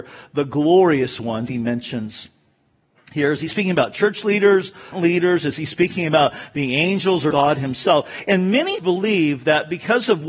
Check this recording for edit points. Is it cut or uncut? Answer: cut